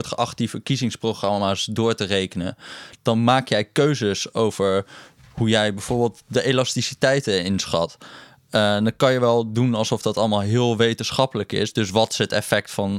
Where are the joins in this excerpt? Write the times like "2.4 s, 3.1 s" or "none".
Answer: none